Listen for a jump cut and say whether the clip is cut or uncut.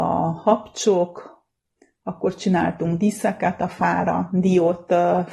uncut